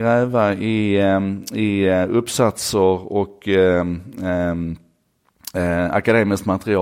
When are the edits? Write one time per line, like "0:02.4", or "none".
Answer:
none